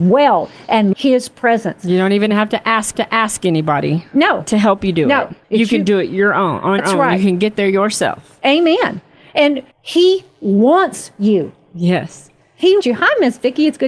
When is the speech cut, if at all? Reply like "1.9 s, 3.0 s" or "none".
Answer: 0.9 s, 2.9 s, 5.4 s, 6.8 s, 9.7 s, 12.8 s